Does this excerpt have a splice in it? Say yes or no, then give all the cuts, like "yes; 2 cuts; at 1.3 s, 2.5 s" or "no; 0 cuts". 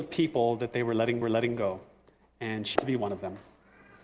yes; 2 cuts; at 1.2 s, 2.8 s